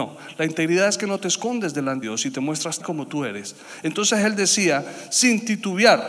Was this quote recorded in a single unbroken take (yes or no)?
no